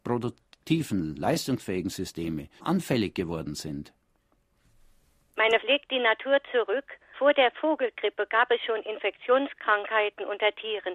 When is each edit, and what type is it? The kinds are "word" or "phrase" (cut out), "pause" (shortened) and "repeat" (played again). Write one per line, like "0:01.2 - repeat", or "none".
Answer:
0:02.6 - word
0:05.6 - word
0:07.1 - word